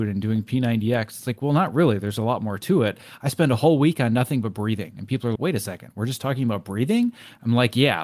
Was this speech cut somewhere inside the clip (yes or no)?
yes